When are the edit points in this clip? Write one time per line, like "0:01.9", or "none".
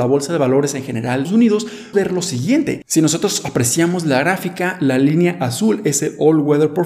0:01.2
0:01.9